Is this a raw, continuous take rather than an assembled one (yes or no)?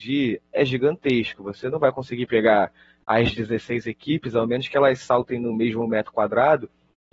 yes